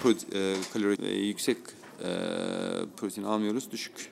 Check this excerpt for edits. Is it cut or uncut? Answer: cut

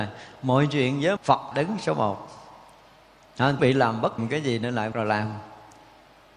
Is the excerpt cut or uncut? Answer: cut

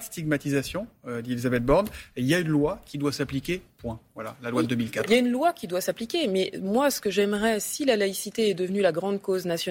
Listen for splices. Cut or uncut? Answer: uncut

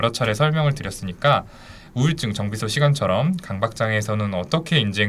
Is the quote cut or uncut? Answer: uncut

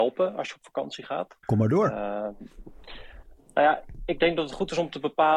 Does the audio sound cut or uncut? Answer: cut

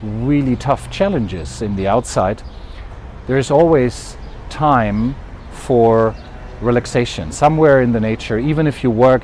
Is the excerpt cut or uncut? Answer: uncut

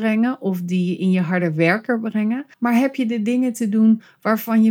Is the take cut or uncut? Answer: cut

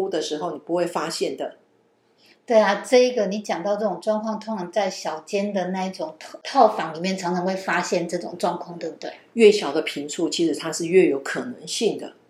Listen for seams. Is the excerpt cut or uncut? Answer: uncut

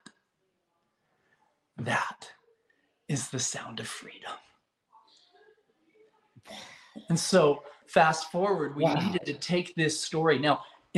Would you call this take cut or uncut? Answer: uncut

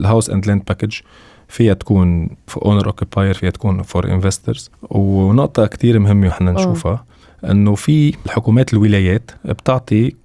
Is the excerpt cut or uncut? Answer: cut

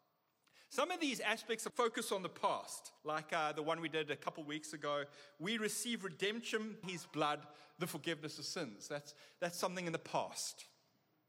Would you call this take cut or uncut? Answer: cut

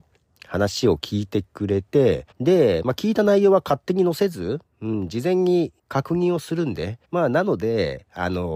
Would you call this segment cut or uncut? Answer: cut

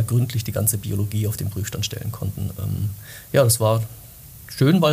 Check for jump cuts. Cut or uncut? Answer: uncut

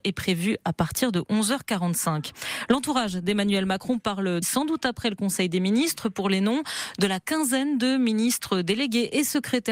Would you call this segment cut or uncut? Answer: cut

